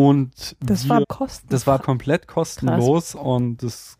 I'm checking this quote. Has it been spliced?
yes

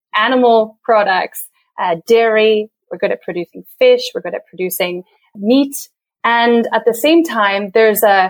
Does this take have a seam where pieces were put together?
no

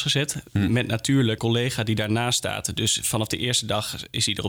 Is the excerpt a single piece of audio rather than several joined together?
no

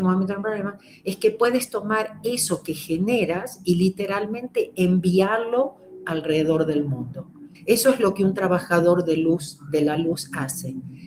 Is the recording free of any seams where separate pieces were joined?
no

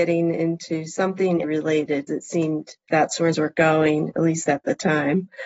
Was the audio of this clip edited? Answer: yes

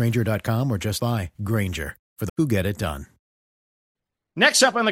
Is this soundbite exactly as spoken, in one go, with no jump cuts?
no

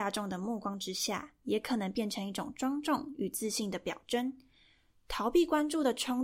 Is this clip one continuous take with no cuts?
yes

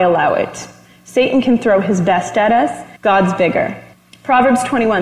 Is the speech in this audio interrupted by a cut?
yes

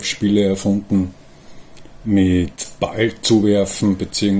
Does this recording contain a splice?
yes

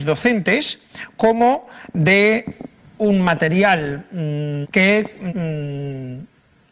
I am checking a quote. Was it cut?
yes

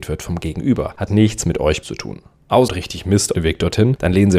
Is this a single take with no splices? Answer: no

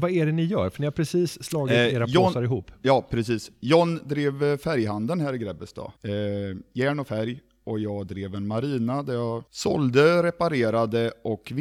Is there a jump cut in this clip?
yes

